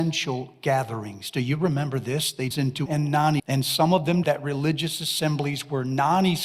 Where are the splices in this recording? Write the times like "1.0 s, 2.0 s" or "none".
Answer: 2.5 s, 2.9 s, 3.4 s, 4.2 s